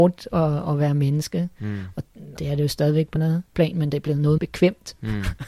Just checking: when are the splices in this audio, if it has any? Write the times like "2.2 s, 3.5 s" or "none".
2.4 s, 3.2 s, 3.5 s, 4.4 s